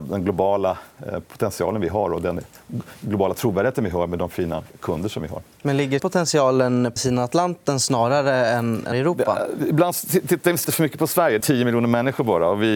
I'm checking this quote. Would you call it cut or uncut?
cut